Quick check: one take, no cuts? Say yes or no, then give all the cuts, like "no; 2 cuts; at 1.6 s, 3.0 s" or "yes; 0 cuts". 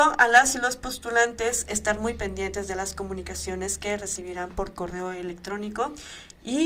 yes; 0 cuts